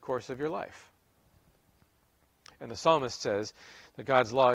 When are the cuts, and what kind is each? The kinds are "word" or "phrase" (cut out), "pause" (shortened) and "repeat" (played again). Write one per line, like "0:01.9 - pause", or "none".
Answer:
none

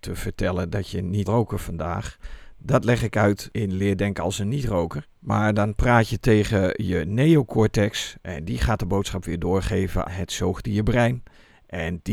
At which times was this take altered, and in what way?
0:01.3 - word
0:05.1 - pause
0:10.1 - word

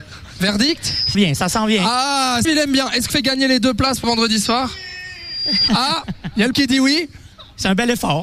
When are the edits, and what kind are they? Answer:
0:01.1 - word
0:02.4 - word
0:03.1 - word
0:04.0 - word
0:05.7 - word
0:06.5 - word

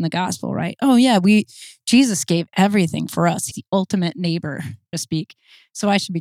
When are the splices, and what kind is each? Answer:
0:03.5 - word
0:04.9 - word

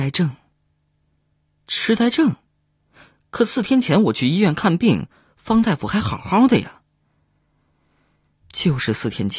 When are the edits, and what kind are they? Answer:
none

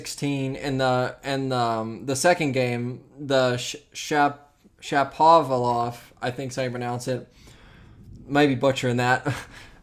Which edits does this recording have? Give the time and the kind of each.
none

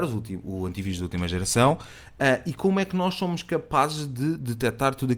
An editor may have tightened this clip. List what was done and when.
none

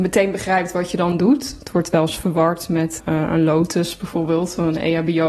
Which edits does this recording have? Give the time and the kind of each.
0:03.0 - word

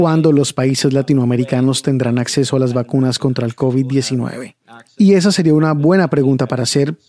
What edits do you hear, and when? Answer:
none

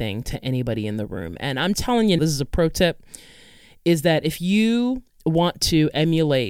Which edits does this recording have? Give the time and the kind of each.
0:01.7 - word
0:02.2 - word

